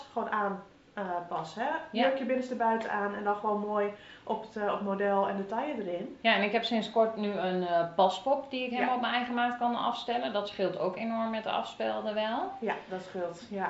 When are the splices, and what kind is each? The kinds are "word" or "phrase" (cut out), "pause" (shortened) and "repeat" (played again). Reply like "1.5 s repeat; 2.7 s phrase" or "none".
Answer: 6.2 s pause